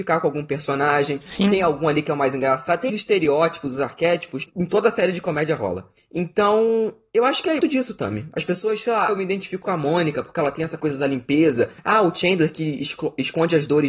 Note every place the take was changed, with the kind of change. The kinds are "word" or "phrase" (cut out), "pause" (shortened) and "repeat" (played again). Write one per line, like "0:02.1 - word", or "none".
0:02.9 - word
0:04.5 - word
0:07.6 - word
0:09.1 - word
0:09.6 - word
0:11.8 - pause